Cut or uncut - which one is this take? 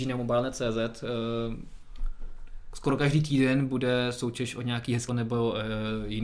cut